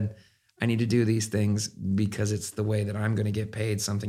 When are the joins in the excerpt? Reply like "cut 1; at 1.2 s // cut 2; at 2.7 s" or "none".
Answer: none